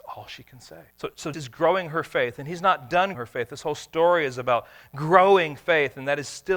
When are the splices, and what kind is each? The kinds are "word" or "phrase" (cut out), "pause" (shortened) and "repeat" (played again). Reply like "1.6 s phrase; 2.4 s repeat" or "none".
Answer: 0.9 s pause; 1.3 s word; 3.1 s word